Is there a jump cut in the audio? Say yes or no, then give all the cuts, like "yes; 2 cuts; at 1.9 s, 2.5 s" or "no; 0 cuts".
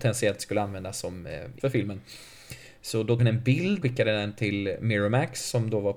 yes; 3 cuts; at 1.6 s, 3.2 s, 3.8 s